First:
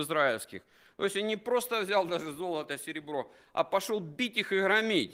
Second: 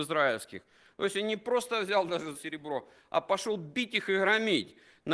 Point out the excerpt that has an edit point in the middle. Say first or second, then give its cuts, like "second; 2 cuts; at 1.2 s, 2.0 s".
second; 1 cut; at 2.3 s